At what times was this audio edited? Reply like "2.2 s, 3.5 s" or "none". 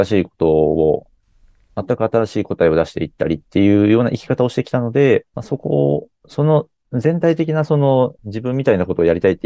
1.2 s, 5.3 s, 8.2 s